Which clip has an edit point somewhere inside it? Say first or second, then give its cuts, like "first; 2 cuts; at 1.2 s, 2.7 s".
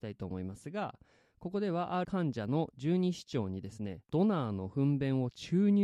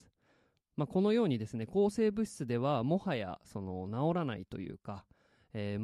first; 2 cuts; at 2.0 s, 4.0 s